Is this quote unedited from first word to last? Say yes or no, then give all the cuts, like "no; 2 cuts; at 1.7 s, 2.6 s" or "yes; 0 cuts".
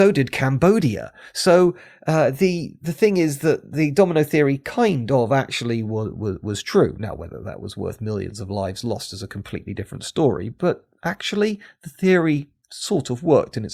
yes; 0 cuts